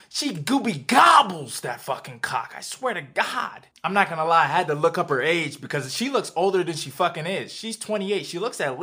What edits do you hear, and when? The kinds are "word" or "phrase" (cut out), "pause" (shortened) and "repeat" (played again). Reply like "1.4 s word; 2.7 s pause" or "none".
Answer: none